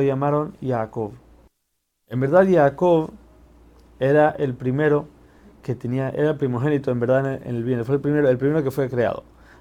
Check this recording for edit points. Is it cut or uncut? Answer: uncut